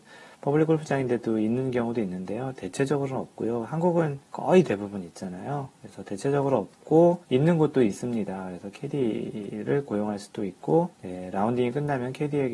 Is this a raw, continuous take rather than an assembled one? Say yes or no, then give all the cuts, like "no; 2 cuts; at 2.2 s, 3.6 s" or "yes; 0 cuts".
no; 3 cuts; at 4.2 s, 7.2 s, 10.9 s